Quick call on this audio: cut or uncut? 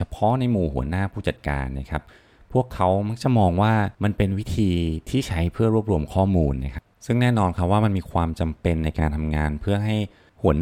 cut